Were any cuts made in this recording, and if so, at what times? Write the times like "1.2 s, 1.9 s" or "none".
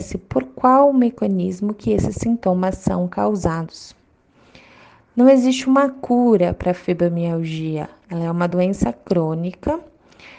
none